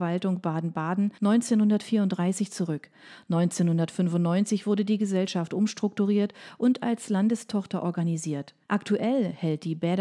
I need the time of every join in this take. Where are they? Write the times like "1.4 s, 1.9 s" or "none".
1.2 s, 8.6 s